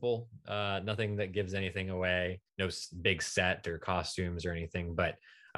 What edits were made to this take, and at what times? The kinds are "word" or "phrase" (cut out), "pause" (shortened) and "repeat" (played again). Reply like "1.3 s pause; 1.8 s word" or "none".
2.5 s pause